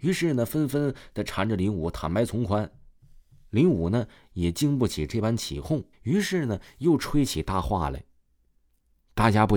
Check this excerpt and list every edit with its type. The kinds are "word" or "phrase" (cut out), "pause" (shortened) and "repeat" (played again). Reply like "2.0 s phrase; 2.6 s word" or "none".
5.9 s pause